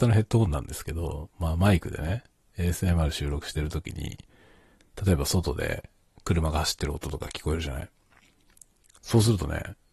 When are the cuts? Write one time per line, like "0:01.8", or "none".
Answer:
none